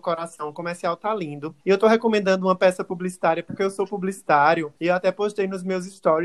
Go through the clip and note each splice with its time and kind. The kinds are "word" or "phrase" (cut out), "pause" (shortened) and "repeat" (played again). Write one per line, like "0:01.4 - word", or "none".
0:01.6 - pause
0:04.8 - pause